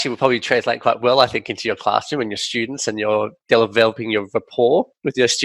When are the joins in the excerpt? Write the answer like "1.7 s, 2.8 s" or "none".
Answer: none